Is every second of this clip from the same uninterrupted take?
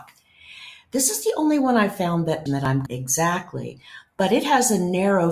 no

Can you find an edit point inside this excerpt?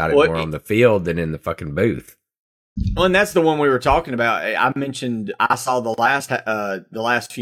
no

